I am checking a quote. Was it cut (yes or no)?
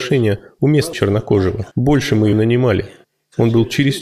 yes